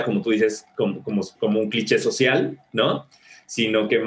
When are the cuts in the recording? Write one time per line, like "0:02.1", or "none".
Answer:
none